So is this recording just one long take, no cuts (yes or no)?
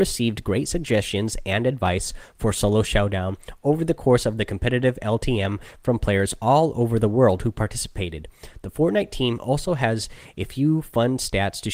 yes